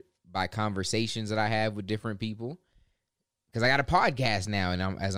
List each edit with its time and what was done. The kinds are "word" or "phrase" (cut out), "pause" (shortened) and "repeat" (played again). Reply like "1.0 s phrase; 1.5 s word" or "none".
none